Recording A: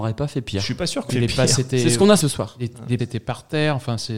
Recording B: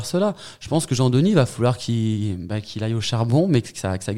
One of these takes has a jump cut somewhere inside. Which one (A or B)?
A